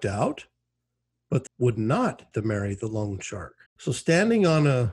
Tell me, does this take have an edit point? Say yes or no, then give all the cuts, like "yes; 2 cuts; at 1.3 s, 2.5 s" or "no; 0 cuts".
yes; 3 cuts; at 1.5 s, 2.3 s, 3.7 s